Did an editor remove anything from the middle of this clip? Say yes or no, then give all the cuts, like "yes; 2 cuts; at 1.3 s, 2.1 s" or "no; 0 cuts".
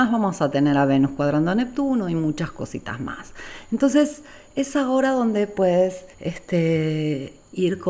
yes; 1 cut; at 6.1 s